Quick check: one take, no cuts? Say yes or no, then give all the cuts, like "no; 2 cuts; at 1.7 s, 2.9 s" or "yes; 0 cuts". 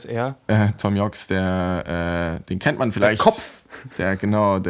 yes; 0 cuts